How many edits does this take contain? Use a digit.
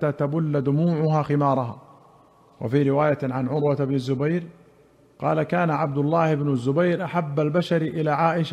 0